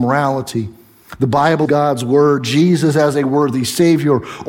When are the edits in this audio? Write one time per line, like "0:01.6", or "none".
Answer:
0:01.7